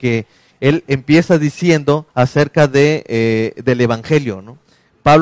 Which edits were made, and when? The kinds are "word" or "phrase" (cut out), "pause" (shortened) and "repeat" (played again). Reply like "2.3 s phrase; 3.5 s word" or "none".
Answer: 2.1 s pause